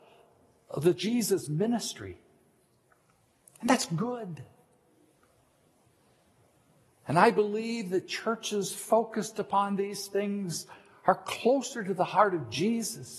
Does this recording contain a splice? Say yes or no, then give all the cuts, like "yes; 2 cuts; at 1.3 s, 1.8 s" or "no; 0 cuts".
no; 0 cuts